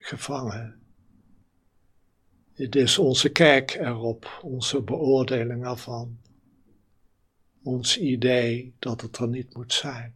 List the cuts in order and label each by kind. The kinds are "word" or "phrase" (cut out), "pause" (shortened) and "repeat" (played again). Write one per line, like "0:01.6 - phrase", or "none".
none